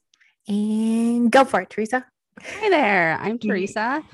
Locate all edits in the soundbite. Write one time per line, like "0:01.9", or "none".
none